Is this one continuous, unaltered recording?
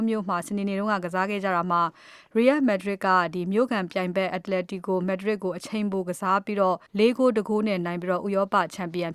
no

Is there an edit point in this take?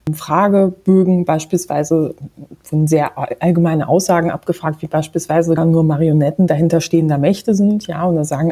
yes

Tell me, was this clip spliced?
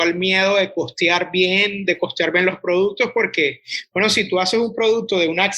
no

